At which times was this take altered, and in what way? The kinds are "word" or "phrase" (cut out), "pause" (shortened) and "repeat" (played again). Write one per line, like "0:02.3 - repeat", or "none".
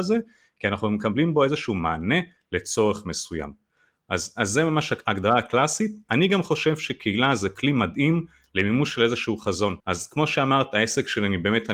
0:09.8 - pause

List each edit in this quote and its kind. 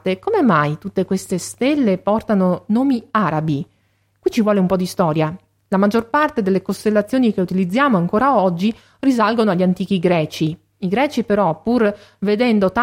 none

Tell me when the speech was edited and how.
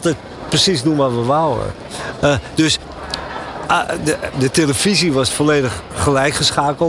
0:04.3 - word

